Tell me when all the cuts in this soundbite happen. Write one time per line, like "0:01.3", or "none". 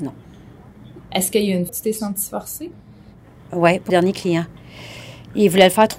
0:01.7
0:03.9